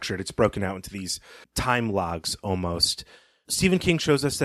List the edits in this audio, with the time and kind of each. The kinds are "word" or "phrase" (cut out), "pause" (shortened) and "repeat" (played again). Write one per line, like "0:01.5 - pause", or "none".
0:01.4 - pause